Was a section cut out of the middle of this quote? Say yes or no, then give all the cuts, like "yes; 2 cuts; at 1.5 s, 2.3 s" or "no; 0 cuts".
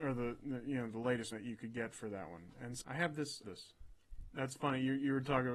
yes; 3 cuts; at 1.3 s, 2.8 s, 3.4 s